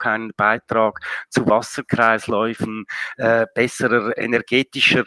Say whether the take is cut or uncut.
uncut